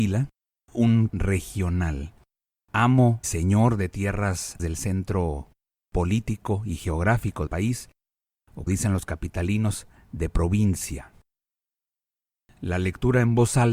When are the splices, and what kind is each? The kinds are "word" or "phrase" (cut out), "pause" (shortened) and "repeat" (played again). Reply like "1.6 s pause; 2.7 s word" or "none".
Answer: 1.1 s word; 3.2 s word; 4.6 s word; 7.5 s word; 8.7 s word